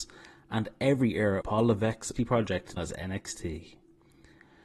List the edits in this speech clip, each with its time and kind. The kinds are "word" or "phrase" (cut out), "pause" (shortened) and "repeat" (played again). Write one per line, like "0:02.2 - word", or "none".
0:01.4 - word
0:02.2 - word
0:02.8 - word